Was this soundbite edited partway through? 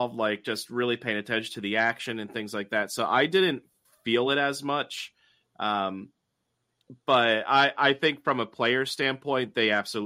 no; 0 cuts

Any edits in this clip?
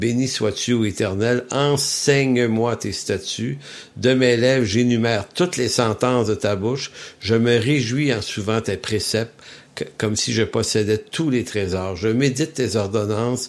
no; 0 cuts

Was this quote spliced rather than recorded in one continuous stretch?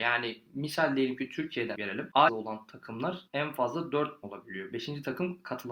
yes; 4 cuts; at 1.7 s, 2.3 s, 3.3 s, 4.2 s

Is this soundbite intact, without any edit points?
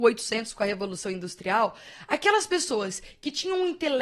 yes; 0 cuts

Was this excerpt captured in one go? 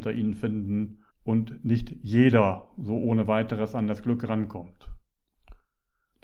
no; 1 cut; at 1.1 s

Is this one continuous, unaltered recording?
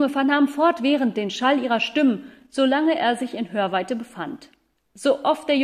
yes; 0 cuts

